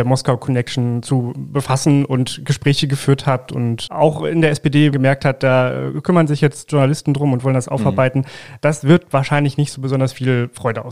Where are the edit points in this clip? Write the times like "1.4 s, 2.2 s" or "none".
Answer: 3.9 s, 4.9 s